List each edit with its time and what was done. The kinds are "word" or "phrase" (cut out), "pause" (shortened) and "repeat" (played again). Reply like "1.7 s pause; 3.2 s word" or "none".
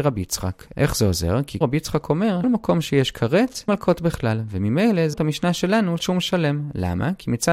1.6 s word; 2.4 s word; 3.7 s word; 5.1 s word; 6.0 s word

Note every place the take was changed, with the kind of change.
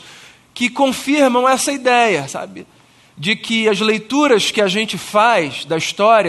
none

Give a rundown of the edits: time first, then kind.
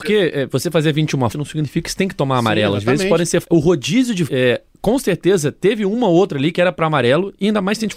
1.3 s word; 3.4 s phrase; 4.3 s word

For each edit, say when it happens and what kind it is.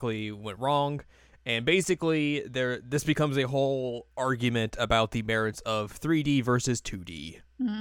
none

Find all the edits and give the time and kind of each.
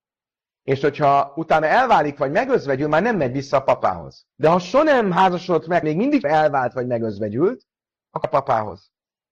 4.3 s pause; 5.8 s word; 6.2 s phrase; 8.2 s word

